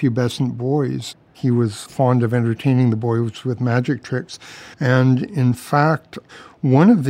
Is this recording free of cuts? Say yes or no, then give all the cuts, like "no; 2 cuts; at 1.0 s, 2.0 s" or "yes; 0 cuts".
no; 3 cuts; at 1.3 s, 1.9 s, 4.7 s